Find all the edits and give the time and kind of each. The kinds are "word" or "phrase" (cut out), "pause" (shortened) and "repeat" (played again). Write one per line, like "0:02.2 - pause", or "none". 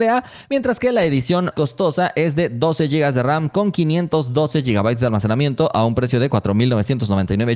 0:01.5 - word